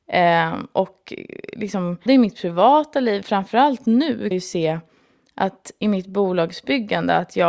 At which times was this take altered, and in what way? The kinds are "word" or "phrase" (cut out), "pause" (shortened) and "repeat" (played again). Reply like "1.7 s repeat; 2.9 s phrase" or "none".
2.1 s word; 3.2 s word; 4.3 s word; 5.8 s word